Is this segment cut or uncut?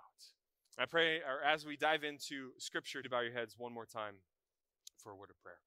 cut